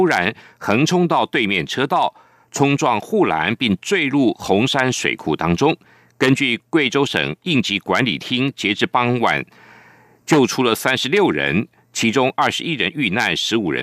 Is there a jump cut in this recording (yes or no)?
no